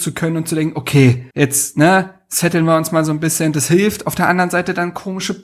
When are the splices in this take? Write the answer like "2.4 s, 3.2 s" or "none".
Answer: 1.3 s